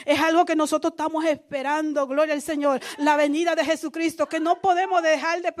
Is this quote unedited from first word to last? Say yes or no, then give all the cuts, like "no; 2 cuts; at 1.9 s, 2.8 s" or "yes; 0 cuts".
yes; 0 cuts